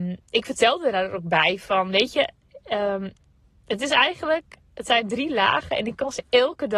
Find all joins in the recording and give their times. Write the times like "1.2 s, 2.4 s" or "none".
none